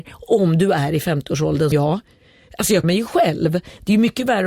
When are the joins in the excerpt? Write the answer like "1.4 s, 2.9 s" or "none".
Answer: 1.7 s, 2.8 s